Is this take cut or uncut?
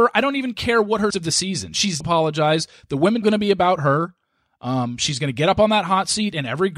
cut